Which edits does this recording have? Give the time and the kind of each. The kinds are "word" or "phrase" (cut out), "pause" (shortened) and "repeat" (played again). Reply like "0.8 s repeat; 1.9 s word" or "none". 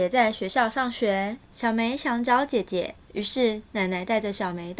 1.4 s pause; 3.0 s pause

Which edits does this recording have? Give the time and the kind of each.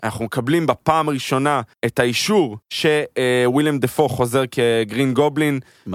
1.7 s pause; 2.6 s pause

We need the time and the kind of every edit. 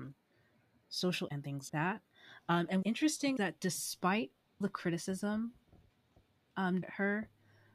1.3 s word; 1.7 s word; 2.8 s word; 3.4 s word; 4.6 s word; 6.8 s word

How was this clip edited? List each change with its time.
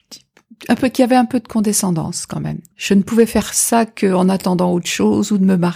none

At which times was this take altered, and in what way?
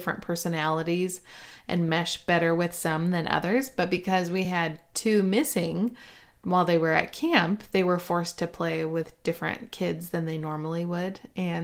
none

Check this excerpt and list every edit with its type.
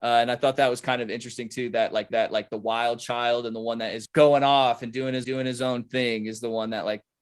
2.1 s repeat; 4.1 s word; 5.2 s repeat

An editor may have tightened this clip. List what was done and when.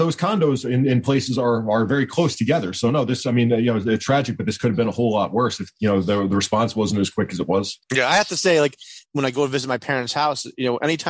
7.8 s pause

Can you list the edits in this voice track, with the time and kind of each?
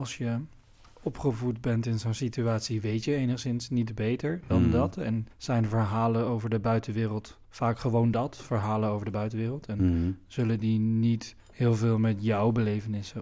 5.3 s pause; 7.4 s pause

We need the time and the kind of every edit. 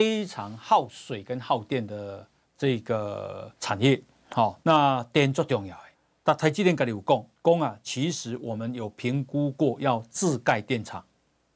2.4 s pause; 3.5 s pause; 4.6 s pause; 5.9 s pause; 7.4 s pause

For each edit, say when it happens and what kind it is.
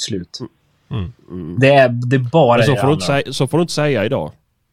none

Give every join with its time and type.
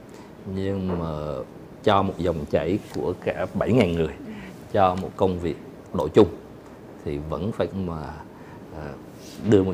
5.9 s word; 7.7 s phrase

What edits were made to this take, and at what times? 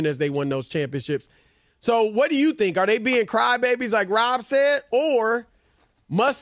none

